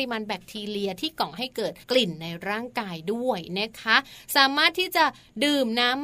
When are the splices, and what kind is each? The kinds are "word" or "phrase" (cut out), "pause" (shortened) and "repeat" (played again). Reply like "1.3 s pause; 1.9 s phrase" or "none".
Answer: 1.8 s pause